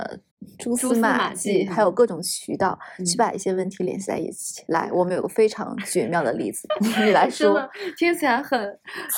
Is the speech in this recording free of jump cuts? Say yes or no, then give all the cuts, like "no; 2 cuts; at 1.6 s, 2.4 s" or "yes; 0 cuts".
no; 1 cut; at 1.7 s